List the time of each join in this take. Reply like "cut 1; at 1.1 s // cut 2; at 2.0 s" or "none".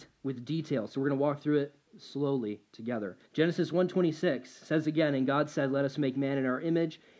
cut 1; at 3.3 s